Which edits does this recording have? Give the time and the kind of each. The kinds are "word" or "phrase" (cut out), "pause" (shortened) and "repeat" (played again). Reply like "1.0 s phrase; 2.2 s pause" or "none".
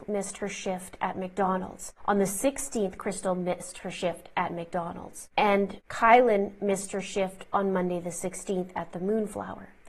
none